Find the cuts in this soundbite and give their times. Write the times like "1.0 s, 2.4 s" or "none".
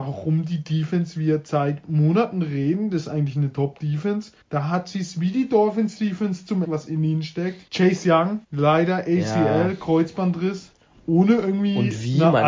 4.4 s, 6.6 s, 7.7 s, 8.4 s